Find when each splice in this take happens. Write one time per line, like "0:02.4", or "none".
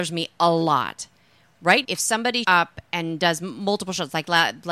0:01.8
0:02.4